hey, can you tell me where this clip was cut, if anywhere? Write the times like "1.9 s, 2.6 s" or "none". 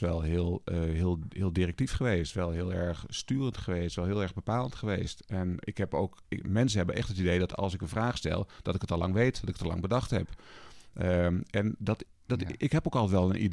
5.6 s, 6.2 s